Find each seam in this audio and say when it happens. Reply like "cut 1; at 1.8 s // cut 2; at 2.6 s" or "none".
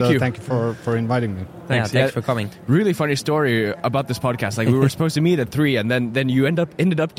none